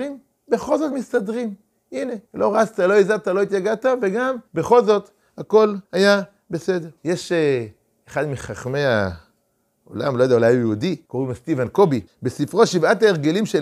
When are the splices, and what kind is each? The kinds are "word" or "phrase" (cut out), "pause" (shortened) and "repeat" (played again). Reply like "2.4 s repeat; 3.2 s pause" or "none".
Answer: 2.2 s pause; 4.5 s pause; 5.8 s pause; 7.0 s pause; 11.0 s pause; 12.1 s pause